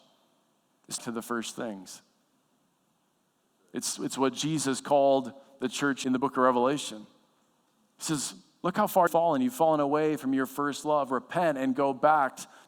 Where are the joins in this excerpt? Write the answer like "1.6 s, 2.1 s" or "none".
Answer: 1.0 s, 6.0 s, 9.1 s